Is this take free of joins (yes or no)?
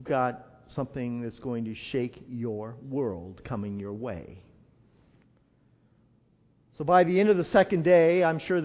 yes